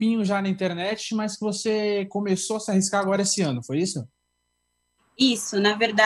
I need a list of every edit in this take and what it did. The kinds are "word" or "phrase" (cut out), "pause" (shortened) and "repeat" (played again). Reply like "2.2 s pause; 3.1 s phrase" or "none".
none

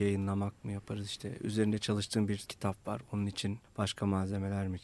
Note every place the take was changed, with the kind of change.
2.5 s word; 3.6 s pause

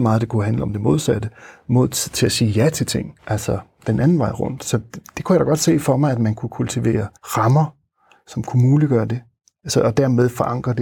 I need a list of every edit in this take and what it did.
3.2 s pause; 7.2 s pause

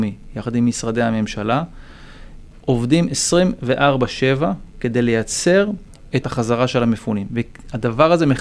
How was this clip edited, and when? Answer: 6.2 s phrase

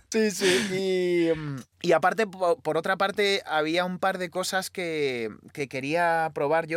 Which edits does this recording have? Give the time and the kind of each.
1.7 s pause

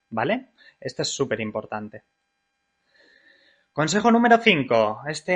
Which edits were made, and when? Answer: none

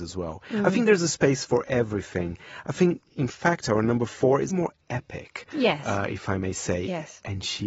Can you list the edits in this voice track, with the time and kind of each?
3.1 s pause; 4.5 s phrase

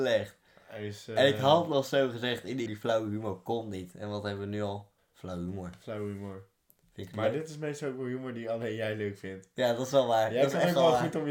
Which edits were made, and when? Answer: 2.7 s word; 5.0 s pause

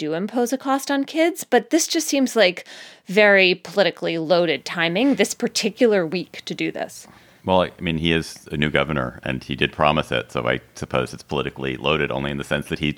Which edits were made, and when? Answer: none

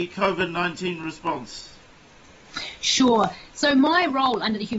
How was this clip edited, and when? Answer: none

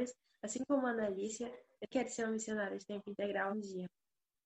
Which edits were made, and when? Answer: 1.9 s word; 3.5 s word

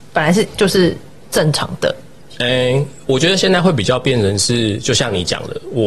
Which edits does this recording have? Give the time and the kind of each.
none

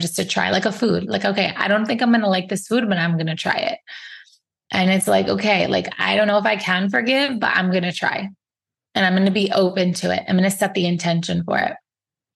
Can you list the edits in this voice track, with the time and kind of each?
none

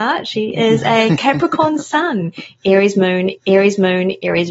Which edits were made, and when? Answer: 3.4 s repeat

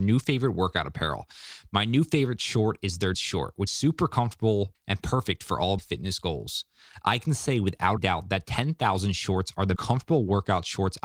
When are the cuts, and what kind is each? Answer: 3.1 s word; 3.7 s word; 4.7 s word; 5.8 s word; 8.0 s word; 9.8 s word

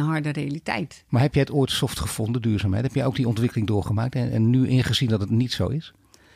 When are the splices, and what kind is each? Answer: none

